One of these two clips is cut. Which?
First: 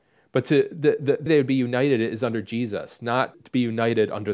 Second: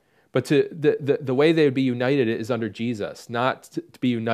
first; 2 cuts; at 1.3 s, 3.3 s

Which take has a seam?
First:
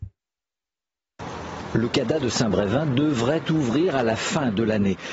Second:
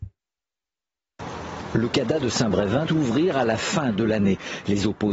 second; 1 cut; at 2.9 s

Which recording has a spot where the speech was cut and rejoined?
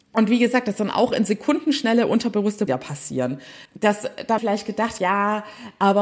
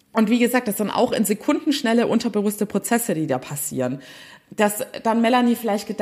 first; 4 cuts; at 2.7 s, 3.7 s, 4.4 s, 5.0 s

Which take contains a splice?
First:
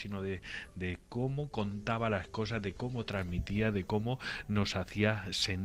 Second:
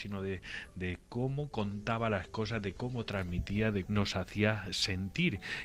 second; 1 cut; at 3.9 s

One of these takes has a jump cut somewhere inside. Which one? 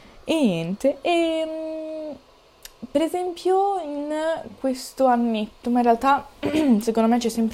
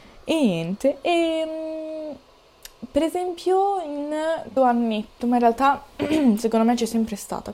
second; 1 cut; at 4.6 s

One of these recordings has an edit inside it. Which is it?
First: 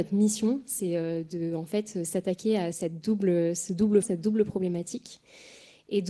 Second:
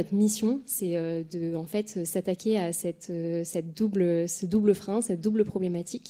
first; 2 cuts; at 2.7 s, 4.0 s

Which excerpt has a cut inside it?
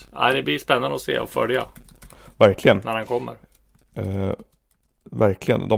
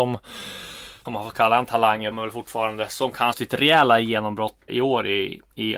second; 4 cuts; at 1.1 s, 2.1 s, 3.3 s, 4.7 s

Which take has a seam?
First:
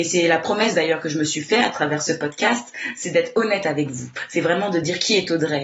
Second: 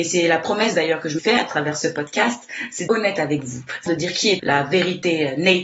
second; 4 cuts; at 1.2 s, 2.9 s, 3.9 s, 4.4 s

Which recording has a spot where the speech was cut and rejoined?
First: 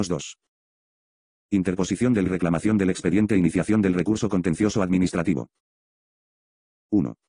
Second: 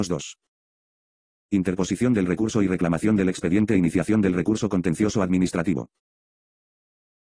first; 1 cut; at 2.3 s

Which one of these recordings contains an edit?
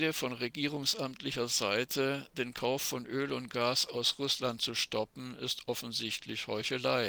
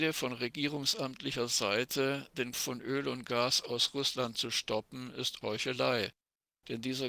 second; 2 cuts; at 2.5 s, 5.4 s

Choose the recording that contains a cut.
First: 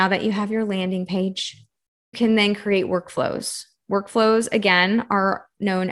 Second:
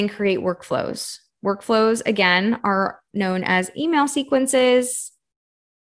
first; 1 cut; at 2.1 s

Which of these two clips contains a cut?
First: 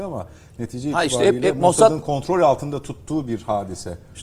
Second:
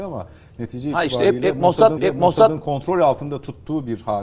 second; 1 cut; at 2.0 s

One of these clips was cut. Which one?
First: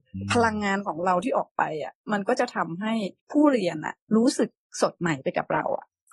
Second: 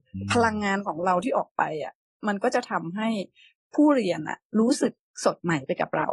first; 2 cuts; at 2.0 s, 3.2 s

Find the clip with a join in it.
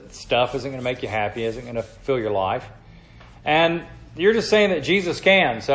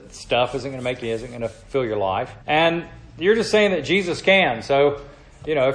second; 2 cuts; at 1.0 s, 2.4 s

